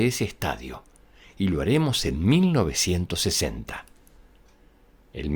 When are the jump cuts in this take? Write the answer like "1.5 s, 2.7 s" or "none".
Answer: none

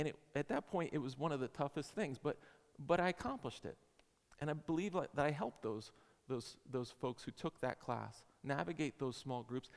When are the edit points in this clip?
none

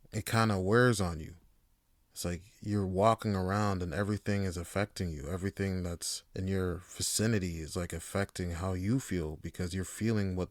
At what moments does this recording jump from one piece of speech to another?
1.8 s, 6.3 s

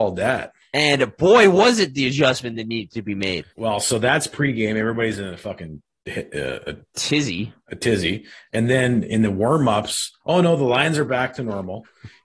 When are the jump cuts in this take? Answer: 3.5 s, 7.6 s

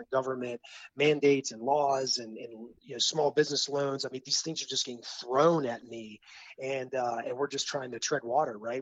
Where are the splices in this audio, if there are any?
2.8 s

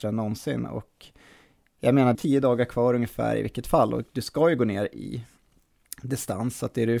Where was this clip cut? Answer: 2.1 s

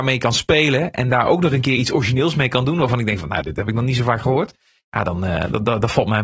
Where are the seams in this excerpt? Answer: none

